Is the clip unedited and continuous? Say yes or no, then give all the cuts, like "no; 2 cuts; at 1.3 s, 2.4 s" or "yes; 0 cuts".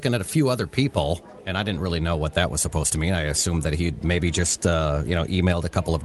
yes; 0 cuts